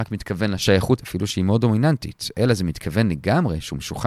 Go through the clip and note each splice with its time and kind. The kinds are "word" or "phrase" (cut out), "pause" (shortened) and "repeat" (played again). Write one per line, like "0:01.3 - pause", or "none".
0:01.0 - word

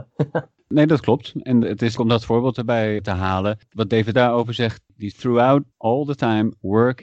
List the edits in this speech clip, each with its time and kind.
0:02.0 - word
0:04.1 - word
0:05.1 - word
0:05.7 - pause

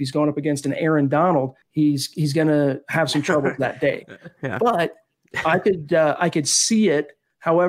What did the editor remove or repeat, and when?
0:01.6 - pause

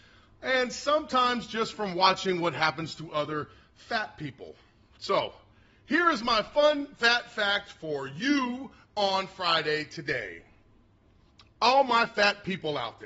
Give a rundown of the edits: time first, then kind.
none

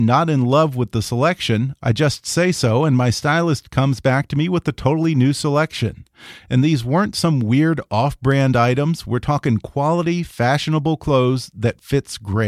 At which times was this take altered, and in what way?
none

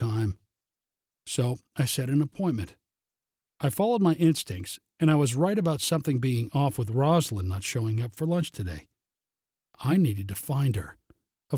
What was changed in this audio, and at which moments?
none

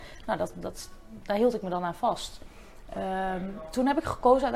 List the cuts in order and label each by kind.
none

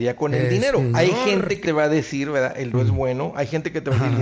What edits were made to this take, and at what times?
0:01.6 - word
0:02.7 - word

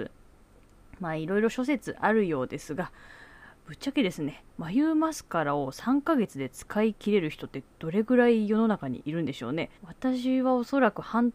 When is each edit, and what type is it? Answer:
0:09.8 - pause

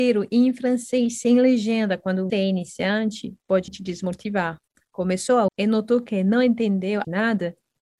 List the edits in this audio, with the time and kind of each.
0:02.3 - word
0:03.7 - word
0:04.7 - pause
0:05.5 - word
0:07.0 - word

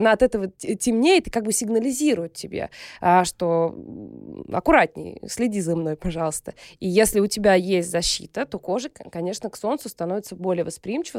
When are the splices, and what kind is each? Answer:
none

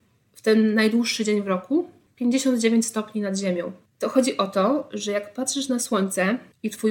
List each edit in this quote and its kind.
none

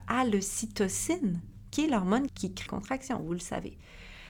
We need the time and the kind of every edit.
0:02.3 - word
0:02.7 - word

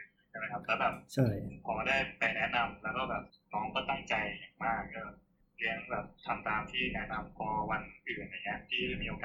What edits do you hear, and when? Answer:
0:03.3 - pause
0:05.4 - pause

